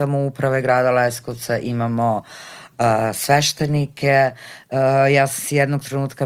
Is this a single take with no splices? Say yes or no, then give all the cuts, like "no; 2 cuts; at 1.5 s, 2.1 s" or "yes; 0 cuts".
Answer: yes; 0 cuts